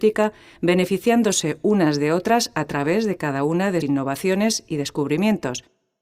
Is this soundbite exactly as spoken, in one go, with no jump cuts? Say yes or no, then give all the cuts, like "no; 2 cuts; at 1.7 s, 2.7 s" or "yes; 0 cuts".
no; 1 cut; at 3.8 s